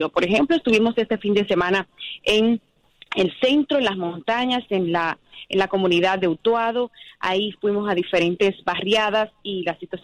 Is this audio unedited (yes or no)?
yes